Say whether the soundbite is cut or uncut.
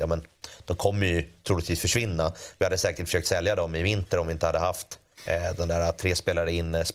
cut